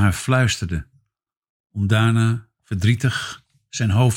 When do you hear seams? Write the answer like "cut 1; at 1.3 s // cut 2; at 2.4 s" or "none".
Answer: none